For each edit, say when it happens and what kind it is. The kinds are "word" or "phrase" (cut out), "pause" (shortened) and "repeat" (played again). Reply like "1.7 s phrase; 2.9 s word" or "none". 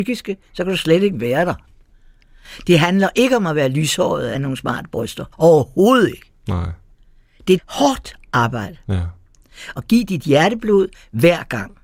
4.3 s phrase; 5.3 s pause; 7.6 s word; 9.8 s phrase